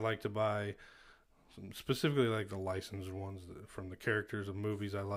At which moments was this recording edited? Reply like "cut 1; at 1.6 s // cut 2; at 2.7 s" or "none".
none